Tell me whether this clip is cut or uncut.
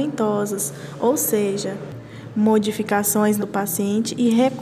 cut